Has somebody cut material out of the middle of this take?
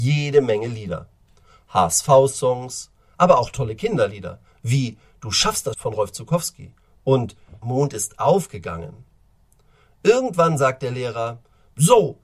yes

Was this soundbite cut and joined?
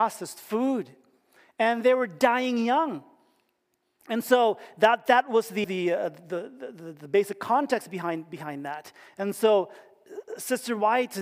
yes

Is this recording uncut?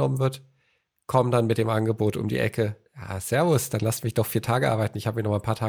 no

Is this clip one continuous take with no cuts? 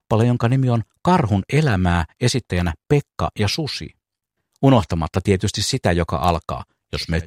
yes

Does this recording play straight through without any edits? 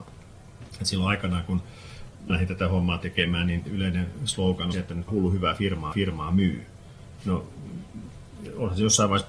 no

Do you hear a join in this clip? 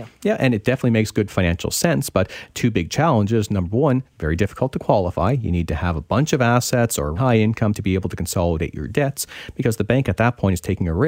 yes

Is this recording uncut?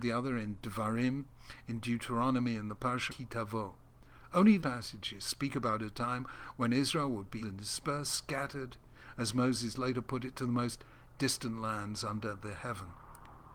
no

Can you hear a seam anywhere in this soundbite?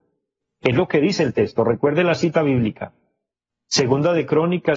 no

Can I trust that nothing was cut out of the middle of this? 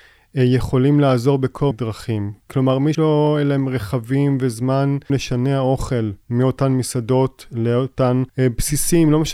no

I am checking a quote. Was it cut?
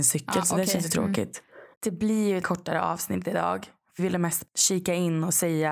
yes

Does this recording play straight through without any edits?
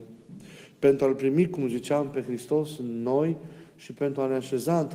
yes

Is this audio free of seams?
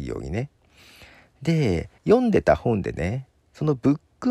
no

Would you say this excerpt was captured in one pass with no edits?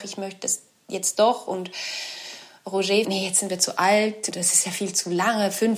no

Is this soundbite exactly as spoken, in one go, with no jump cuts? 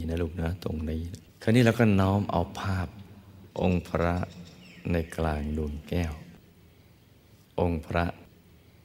no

